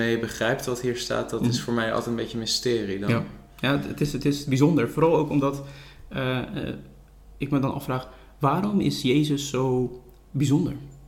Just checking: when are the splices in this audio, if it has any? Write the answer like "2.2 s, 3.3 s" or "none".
none